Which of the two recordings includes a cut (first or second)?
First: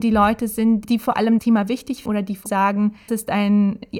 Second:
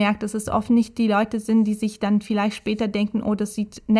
first